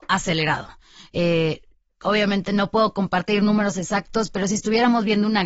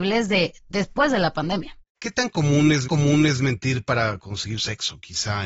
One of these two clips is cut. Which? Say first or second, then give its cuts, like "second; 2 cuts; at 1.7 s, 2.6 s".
second; 3 cuts; at 1.8 s, 2.8 s, 4.6 s